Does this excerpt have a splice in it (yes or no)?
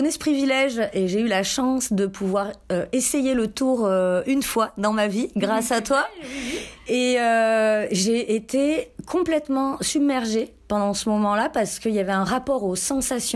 no